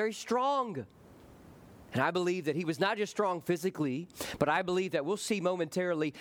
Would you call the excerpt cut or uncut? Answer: uncut